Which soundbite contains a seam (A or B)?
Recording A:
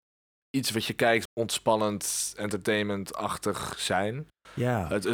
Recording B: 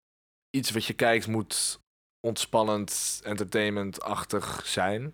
A